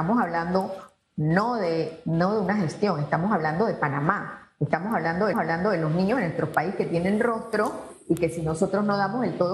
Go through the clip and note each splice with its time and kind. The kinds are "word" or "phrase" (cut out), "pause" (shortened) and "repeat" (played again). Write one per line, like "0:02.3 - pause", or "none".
0:05.3 - repeat